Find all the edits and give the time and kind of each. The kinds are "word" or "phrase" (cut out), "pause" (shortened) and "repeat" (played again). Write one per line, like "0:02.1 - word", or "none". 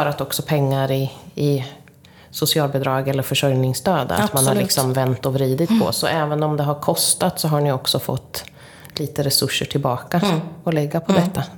none